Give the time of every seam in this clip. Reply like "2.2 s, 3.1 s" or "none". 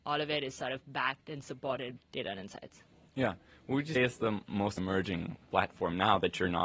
2.0 s, 3.9 s, 4.8 s